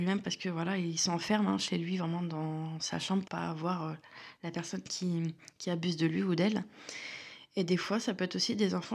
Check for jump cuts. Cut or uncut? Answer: cut